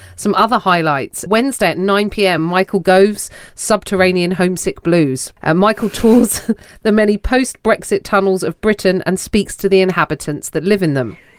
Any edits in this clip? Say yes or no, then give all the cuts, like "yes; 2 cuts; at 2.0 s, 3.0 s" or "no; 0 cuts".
no; 0 cuts